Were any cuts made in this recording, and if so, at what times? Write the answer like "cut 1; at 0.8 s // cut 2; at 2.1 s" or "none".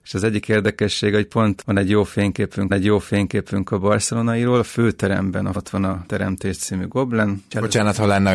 cut 1; at 2.7 s // cut 2; at 5.5 s